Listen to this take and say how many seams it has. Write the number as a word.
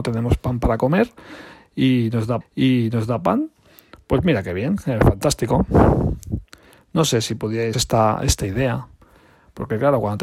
two